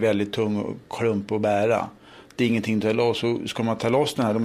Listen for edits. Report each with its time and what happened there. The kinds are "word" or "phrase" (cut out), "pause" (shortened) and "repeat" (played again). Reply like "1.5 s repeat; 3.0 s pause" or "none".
none